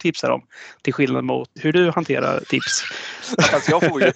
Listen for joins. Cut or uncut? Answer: cut